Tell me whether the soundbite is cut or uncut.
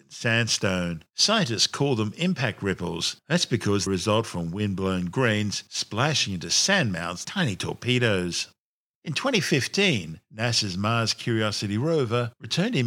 cut